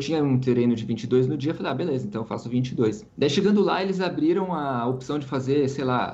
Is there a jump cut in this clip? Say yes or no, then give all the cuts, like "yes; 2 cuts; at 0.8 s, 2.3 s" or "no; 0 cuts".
yes; 1 cut; at 3.1 s